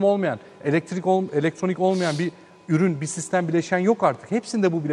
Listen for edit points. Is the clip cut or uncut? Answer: uncut